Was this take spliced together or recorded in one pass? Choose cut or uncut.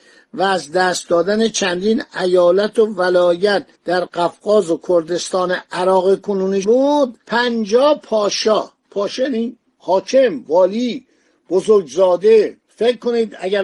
cut